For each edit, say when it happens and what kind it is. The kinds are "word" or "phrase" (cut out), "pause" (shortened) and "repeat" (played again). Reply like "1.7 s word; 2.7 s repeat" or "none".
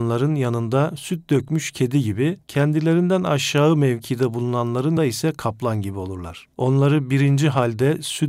2.4 s pause; 5.0 s word; 6.5 s pause